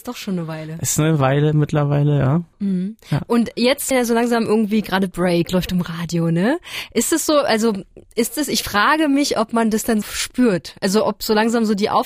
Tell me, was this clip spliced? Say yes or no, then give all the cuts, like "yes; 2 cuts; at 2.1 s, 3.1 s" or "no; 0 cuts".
yes; 2 cuts; at 3.9 s, 10.0 s